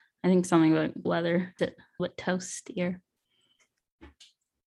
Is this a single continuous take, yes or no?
no